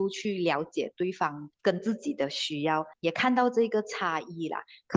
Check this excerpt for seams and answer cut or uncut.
cut